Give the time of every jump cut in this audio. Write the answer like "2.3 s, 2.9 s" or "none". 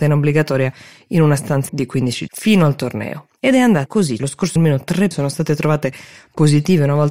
1.7 s, 2.3 s, 3.9 s, 4.2 s, 4.6 s, 5.1 s